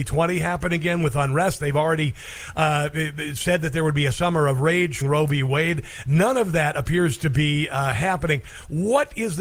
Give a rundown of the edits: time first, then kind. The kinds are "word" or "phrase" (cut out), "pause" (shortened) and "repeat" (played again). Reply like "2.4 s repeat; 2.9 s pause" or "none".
5.0 s word